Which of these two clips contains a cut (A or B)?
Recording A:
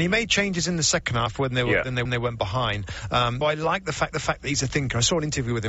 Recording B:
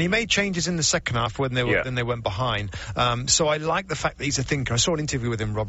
A